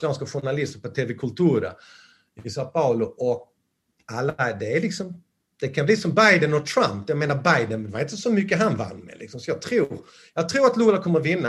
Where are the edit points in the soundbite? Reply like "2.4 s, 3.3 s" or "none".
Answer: none